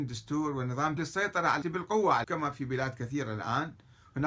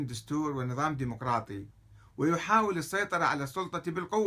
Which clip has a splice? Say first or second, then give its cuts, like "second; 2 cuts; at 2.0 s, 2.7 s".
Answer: first; 3 cuts; at 1.0 s, 1.6 s, 2.2 s